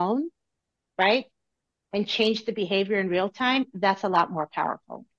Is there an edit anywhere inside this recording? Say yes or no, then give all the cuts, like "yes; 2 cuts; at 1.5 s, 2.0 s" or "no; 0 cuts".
no; 0 cuts